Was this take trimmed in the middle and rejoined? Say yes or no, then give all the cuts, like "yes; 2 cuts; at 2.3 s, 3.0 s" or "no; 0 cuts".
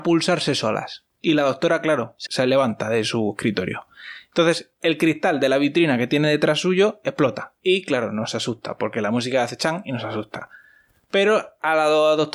yes; 3 cuts; at 1.1 s, 2.3 s, 7.6 s